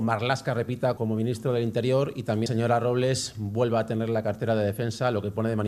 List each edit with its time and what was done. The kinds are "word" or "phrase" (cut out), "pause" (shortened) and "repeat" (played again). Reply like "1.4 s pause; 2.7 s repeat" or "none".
1.0 s word; 2.5 s phrase